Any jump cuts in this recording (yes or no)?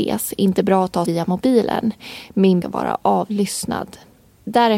yes